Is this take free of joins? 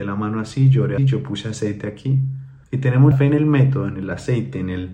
no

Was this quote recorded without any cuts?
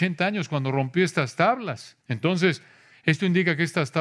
no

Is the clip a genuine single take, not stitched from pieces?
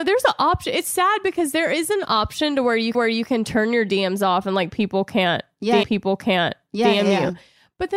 no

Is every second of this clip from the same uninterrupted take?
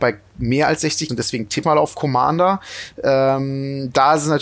no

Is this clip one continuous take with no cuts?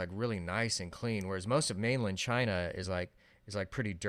yes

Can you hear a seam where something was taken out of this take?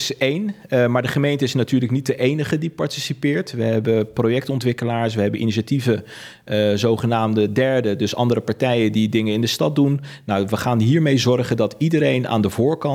no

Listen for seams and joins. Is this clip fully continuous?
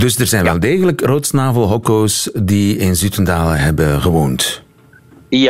yes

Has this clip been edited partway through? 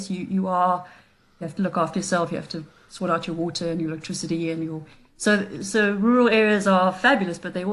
no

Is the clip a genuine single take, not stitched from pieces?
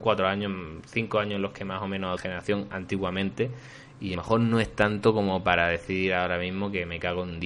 no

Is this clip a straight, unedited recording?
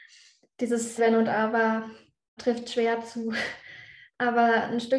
no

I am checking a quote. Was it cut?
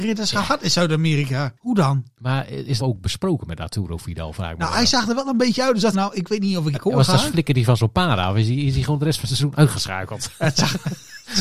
yes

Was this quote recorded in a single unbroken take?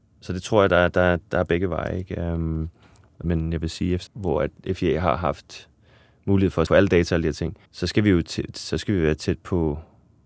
no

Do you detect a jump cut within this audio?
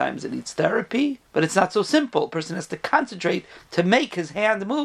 yes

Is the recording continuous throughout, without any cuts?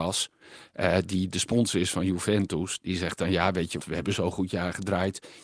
no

